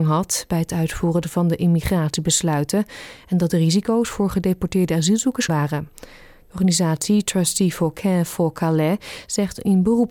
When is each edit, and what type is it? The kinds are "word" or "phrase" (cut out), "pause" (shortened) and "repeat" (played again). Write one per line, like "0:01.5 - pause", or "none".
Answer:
0:05.5 - word
0:05.9 - pause

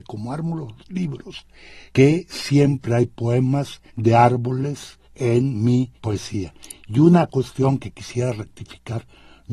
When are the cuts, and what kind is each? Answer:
0:01.9 - pause
0:03.9 - pause
0:05.0 - pause
0:06.0 - pause

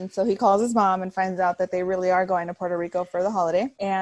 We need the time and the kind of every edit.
none

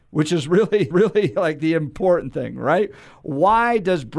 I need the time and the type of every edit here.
0:00.9 - repeat

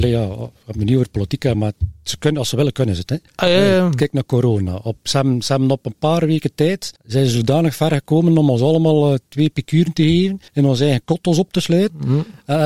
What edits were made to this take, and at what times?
0:01.5 - word
0:03.3 - pause
0:07.0 - pause
0:10.5 - pause

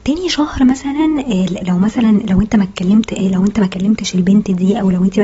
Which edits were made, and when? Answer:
0:01.6 - word

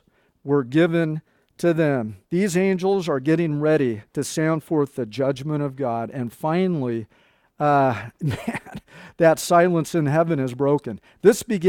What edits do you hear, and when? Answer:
0:02.2 - pause
0:04.1 - pause

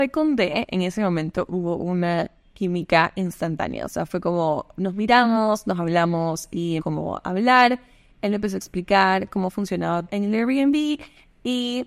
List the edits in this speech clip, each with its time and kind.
0:06.8 - word
0:10.1 - word

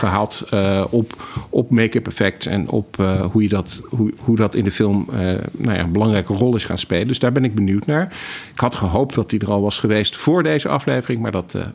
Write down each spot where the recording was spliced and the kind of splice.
none

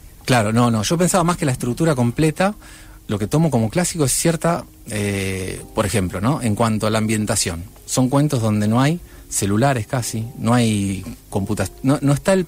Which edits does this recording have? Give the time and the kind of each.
0:03.0 - pause

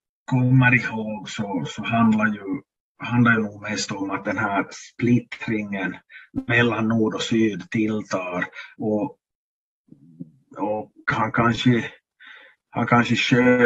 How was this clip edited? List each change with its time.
none

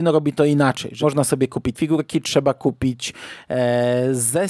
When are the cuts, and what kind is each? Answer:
0:01.0 - word
0:01.7 - word

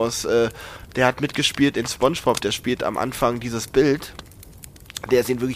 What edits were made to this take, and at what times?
none

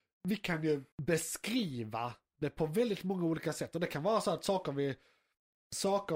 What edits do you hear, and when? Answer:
0:00.9 - pause

